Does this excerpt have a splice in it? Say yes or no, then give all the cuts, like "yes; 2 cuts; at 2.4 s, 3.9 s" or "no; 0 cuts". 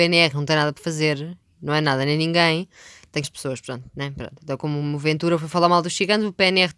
yes; 1 cut; at 3.2 s